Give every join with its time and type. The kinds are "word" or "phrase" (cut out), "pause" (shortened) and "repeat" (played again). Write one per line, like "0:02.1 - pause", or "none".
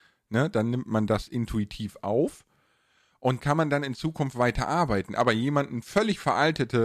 0:03.4 - word

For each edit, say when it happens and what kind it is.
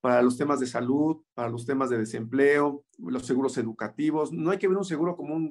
0:01.3 - pause
0:02.9 - pause

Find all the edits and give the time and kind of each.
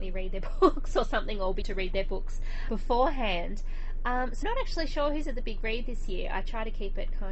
0:01.6 - word
0:02.7 - word
0:04.4 - word

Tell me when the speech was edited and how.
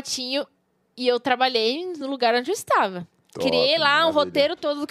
none

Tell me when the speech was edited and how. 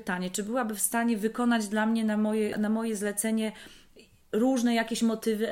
0:02.5 - word

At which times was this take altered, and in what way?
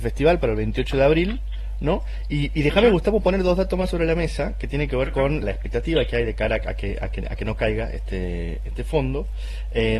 0:05.4 - word

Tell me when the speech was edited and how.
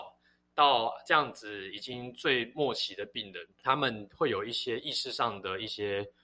0:03.5 - pause

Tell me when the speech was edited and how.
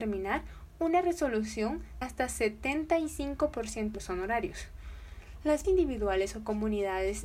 0:02.0 - word
0:03.9 - word
0:05.6 - word

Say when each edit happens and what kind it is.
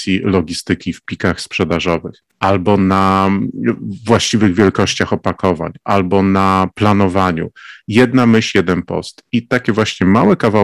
0:02.3 - pause

